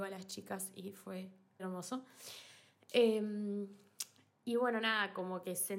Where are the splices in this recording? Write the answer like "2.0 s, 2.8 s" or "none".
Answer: 1.6 s

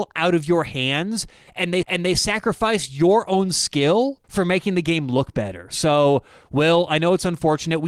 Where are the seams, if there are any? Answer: 1.8 s, 4.2 s

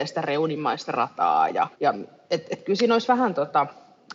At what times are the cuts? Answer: 1.7 s

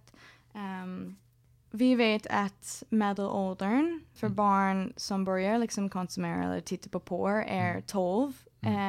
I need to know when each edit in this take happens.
none

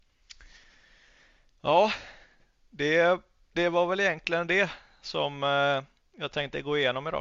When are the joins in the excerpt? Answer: none

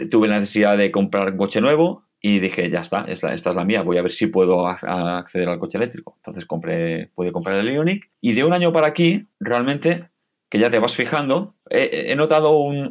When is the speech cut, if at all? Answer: 2.1 s, 8.1 s, 9.3 s, 11.6 s

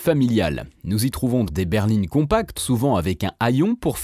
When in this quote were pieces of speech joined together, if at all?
1.5 s, 2.6 s

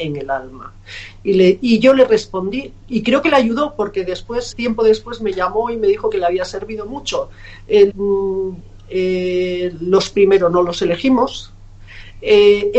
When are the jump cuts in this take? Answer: 2.9 s, 4.5 s, 7.9 s, 10.1 s

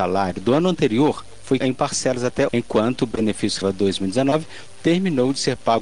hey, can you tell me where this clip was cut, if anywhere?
1.6 s, 2.5 s, 3.6 s

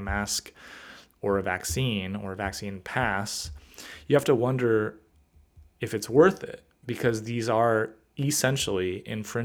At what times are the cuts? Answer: none

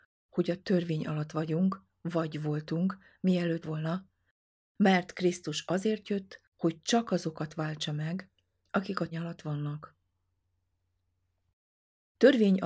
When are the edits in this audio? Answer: 3.6 s, 6.5 s, 9.1 s

